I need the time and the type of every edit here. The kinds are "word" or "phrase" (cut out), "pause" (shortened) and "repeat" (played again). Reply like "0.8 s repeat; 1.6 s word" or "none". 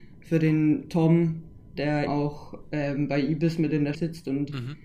1.8 s word; 2.1 s word; 3.9 s word

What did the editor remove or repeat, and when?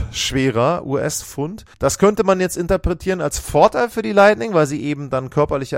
1.7 s pause

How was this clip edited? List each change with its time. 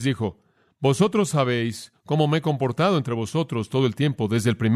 none

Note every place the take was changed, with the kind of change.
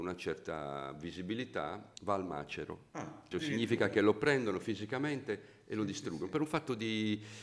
2.0 s pause; 3.3 s phrase

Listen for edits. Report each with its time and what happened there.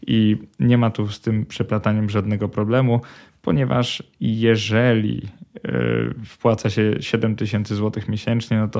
none

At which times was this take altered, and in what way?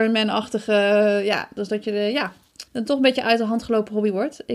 2.7 s pause

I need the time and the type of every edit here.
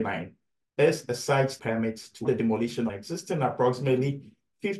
1.6 s word; 2.2 s word; 2.9 s phrase

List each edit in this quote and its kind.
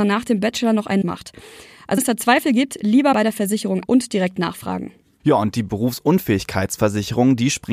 1.0 s word; 2.0 s word; 3.1 s word; 3.9 s word

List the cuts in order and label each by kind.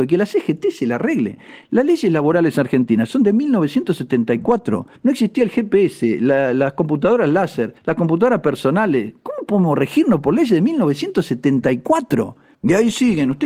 5.0 s pause; 7.8 s pause; 12.5 s pause

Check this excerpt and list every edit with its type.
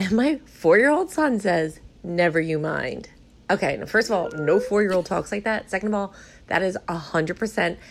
none

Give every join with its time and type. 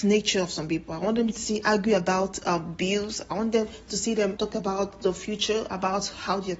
none

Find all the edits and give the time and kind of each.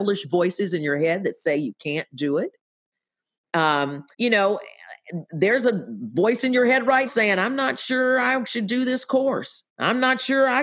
4.1 s pause; 7.1 s word; 9.7 s pause

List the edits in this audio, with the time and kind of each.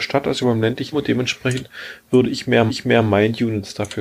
0.9 s word; 2.7 s repeat

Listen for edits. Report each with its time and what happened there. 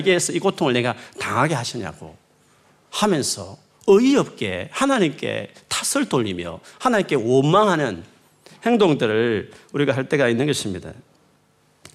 none

